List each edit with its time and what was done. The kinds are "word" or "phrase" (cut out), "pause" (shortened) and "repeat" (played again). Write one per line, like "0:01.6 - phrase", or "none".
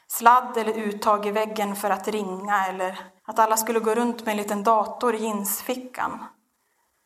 0:03.2 - pause